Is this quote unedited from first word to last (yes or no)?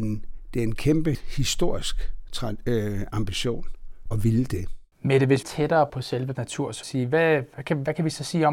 no